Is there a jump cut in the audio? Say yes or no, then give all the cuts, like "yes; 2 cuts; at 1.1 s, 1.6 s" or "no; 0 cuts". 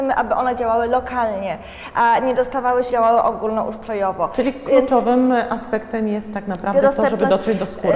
yes; 1 cut; at 2.9 s